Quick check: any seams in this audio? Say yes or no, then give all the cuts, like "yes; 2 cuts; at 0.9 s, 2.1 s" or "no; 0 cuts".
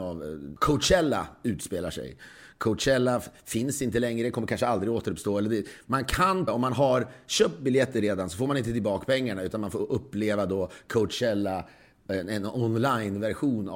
yes; 1 cut; at 6.5 s